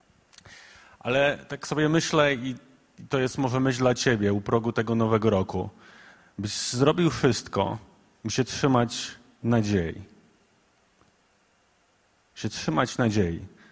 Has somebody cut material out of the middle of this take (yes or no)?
no